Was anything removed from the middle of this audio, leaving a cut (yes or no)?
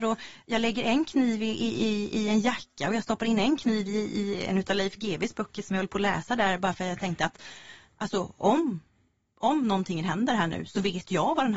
no